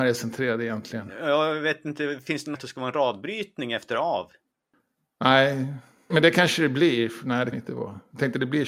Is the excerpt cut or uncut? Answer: cut